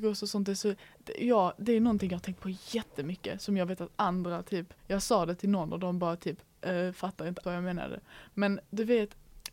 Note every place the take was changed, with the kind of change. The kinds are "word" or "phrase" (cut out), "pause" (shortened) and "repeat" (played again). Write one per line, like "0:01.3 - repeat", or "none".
0:04.8 - pause
0:07.4 - word